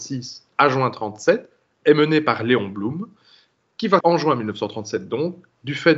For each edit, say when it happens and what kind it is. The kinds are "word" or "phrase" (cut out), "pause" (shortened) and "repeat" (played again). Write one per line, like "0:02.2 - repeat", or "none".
0:04.0 - word

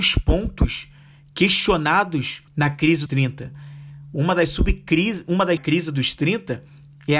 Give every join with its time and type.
0:02.5 - pause
0:03.1 - word
0:05.6 - phrase

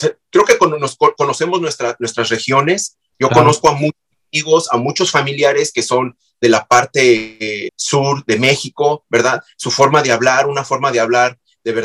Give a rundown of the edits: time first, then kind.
0:07.7 - word

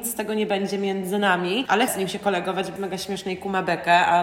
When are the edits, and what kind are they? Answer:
0:01.9 - word
0:02.8 - word

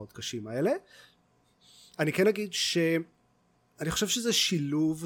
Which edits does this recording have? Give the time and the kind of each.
none

